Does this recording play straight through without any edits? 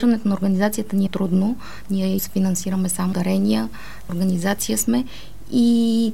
no; 4 cuts; at 1.1 s, 2.2 s, 3.1 s, 4.1 s

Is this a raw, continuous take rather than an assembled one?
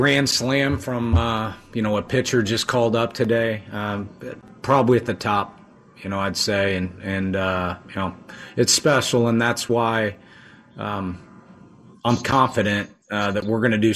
yes; 0 cuts

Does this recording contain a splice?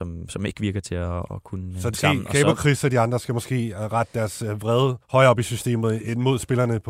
yes; 2 cuts; at 1.9 s, 5.0 s

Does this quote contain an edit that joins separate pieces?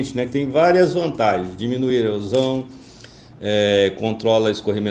no; 0 cuts

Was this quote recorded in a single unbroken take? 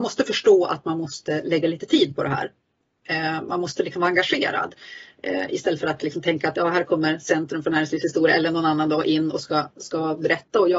yes; 0 cuts

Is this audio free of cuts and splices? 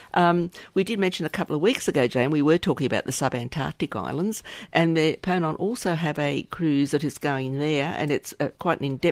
yes; 0 cuts

